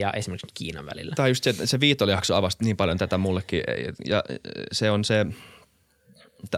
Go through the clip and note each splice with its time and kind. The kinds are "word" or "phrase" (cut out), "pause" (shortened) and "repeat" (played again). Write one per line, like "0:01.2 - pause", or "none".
none